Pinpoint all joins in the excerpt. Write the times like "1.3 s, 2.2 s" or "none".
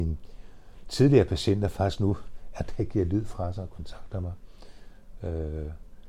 none